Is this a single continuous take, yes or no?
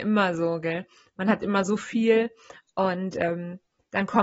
yes